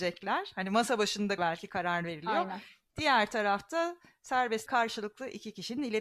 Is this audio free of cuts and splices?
no; 2 cuts; at 1.4 s, 4.7 s

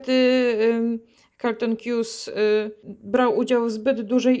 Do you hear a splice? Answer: no; 0 cuts

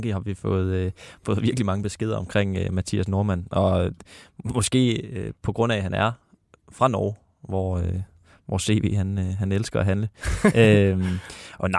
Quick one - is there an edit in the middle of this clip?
no; 0 cuts

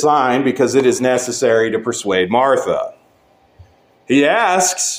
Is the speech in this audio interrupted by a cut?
no; 0 cuts

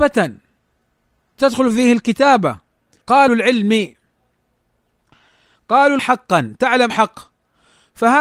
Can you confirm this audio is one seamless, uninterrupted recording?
no; 3 cuts; at 3.3 s, 6.0 s, 6.9 s

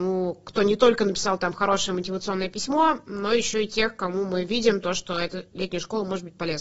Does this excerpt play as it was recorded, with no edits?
yes; 0 cuts

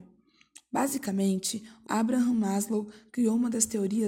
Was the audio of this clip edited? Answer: yes; 1 cut; at 1.8 s

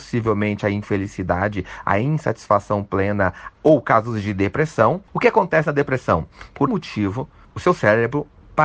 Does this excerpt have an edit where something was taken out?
yes; 2 cuts; at 3.5 s, 6.7 s

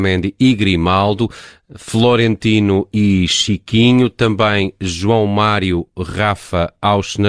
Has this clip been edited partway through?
no; 0 cuts

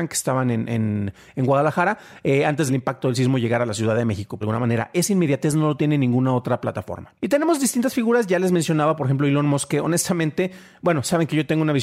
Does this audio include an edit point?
yes; 3 cuts; at 2.7 s, 4.4 s, 7.2 s

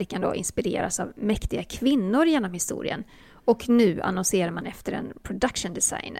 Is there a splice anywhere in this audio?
no; 0 cuts

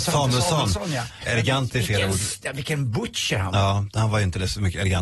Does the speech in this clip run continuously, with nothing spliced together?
yes; 0 cuts

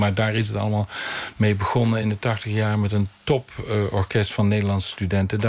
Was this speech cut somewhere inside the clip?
no; 0 cuts

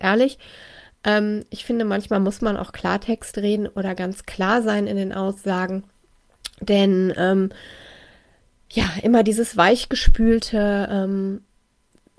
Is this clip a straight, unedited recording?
yes; 0 cuts

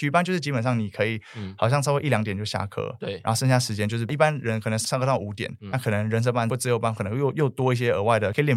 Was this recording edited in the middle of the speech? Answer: yes; 1 cut; at 5.6 s

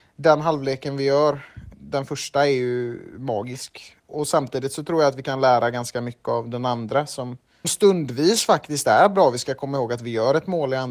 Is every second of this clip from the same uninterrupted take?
no; 3 cuts; at 1.7 s, 4.0 s, 7.6 s

